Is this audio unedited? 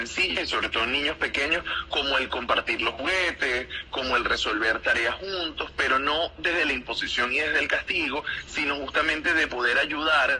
yes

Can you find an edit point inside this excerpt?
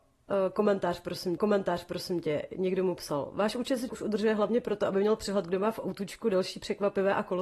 yes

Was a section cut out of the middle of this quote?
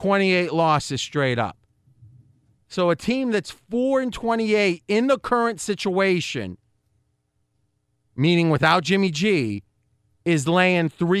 no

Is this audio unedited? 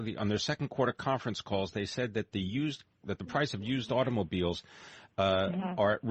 yes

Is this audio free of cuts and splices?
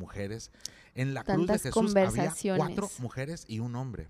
yes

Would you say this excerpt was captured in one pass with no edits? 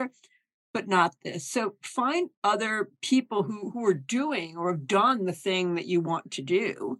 yes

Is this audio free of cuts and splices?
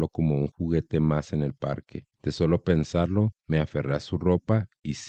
no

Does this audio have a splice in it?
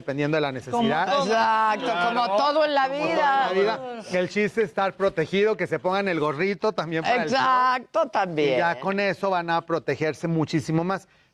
no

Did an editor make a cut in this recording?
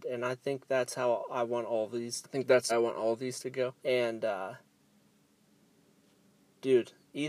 yes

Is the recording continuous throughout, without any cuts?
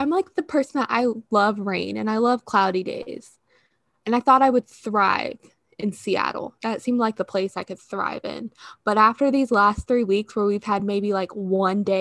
yes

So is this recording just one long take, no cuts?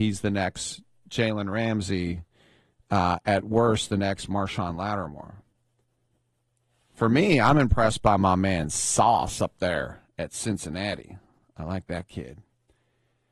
yes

